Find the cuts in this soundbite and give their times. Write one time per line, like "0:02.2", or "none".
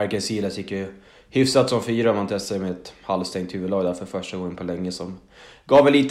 none